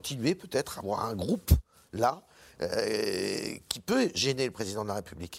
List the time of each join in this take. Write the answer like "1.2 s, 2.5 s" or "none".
none